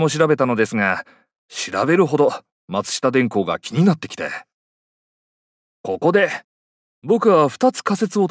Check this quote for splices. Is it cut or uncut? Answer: uncut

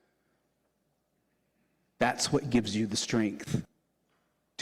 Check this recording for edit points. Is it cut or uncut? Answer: uncut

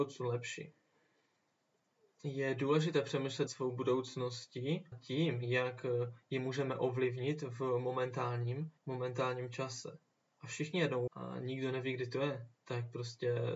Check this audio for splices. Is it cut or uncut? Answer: cut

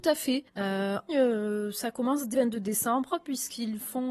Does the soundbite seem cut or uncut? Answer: cut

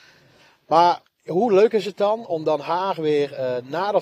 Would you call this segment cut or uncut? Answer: uncut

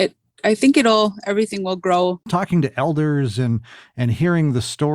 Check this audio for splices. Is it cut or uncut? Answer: cut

